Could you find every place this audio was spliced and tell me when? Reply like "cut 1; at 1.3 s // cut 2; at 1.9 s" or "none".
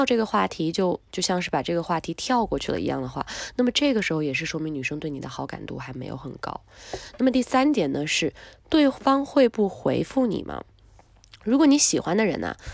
cut 1; at 1.1 s